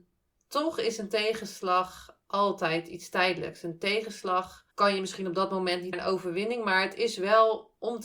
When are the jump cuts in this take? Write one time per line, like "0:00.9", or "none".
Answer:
0:04.7
0:05.9